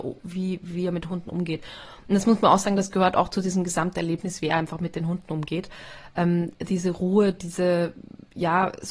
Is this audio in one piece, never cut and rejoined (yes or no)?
yes